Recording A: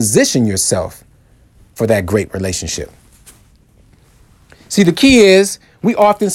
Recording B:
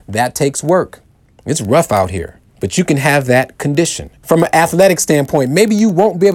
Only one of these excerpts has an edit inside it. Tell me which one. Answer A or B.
B